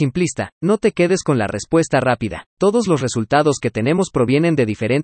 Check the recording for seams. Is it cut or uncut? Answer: cut